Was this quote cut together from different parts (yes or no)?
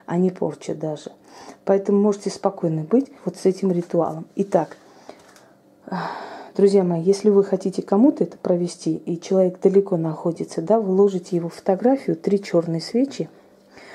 yes